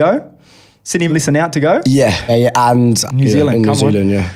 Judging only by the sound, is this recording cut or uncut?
cut